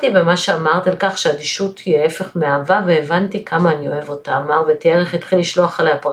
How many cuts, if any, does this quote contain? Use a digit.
0